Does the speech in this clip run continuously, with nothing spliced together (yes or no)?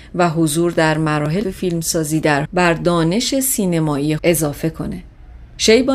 no